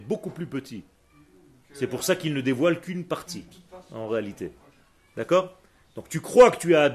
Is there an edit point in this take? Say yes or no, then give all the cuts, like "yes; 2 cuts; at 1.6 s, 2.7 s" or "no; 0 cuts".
no; 0 cuts